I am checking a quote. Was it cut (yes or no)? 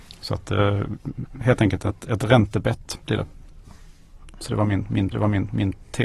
yes